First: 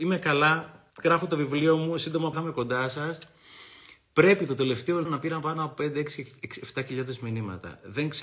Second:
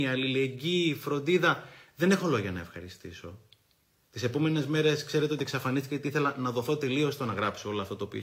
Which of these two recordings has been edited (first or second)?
first